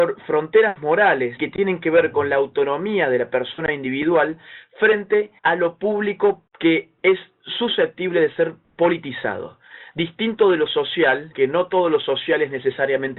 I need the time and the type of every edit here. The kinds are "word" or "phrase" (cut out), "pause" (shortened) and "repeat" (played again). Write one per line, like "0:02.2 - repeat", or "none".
0:01.4 - word
0:05.4 - pause
0:06.5 - pause
0:11.3 - word